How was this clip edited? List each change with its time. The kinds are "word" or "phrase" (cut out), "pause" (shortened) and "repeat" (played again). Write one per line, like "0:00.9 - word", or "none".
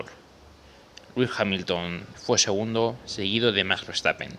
0:02.1 - word